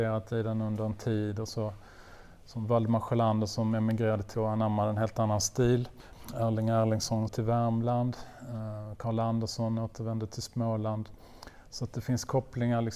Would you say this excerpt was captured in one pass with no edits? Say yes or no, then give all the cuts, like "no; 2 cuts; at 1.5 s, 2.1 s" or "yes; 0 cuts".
no; 2 cuts; at 4.3 s, 7.3 s